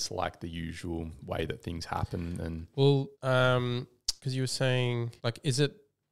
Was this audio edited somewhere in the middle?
yes; 3 cuts; at 3.1 s, 4.2 s, 5.2 s

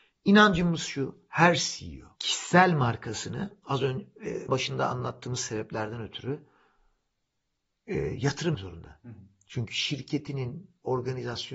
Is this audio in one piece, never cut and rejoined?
no; 3 cuts; at 2.1 s, 4.5 s, 8.5 s

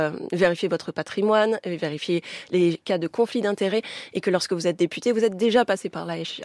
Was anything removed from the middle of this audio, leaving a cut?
no; 0 cuts

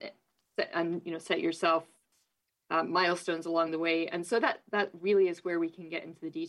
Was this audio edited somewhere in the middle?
no; 0 cuts

